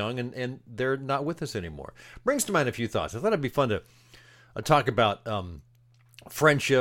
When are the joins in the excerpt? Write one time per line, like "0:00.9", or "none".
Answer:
none

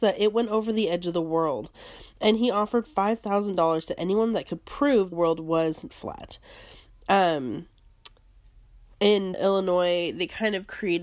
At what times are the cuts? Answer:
0:05.1
0:05.9
0:09.3

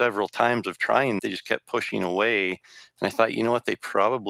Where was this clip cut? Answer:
0:01.2

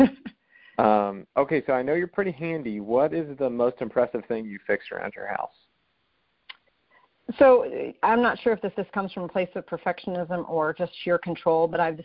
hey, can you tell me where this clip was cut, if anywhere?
0:08.7

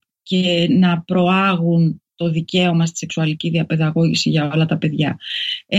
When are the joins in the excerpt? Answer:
none

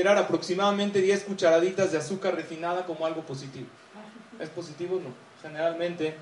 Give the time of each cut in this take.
none

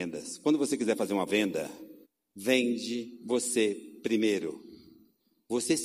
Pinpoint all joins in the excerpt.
0:01.3
0:02.0

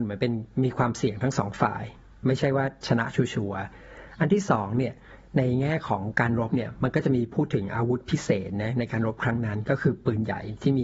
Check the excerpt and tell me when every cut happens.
none

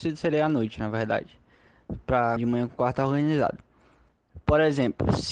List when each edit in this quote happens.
0:02.4

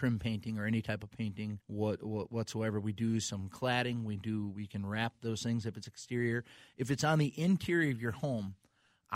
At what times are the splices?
0:01.6

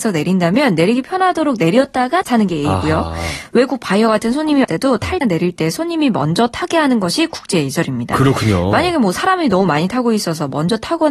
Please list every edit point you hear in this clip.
0:02.2
0:04.6
0:05.2

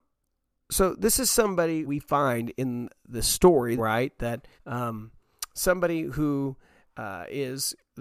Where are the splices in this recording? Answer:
0:01.8
0:03.8
0:04.6

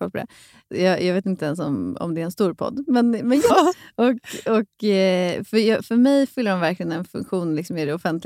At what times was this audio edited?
0:03.5

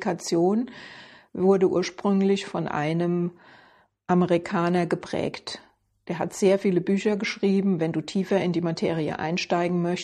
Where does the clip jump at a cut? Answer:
none

